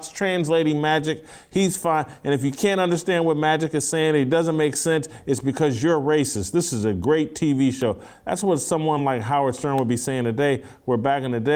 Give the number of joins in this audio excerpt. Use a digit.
0